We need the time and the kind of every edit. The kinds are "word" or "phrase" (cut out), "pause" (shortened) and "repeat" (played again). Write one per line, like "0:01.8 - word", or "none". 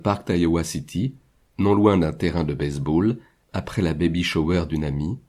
none